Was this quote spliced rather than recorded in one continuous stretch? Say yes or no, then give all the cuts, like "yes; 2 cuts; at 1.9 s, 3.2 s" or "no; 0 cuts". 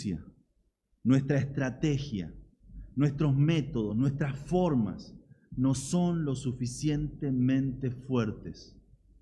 no; 0 cuts